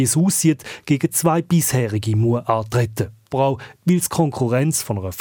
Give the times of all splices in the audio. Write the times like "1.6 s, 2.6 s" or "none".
3.3 s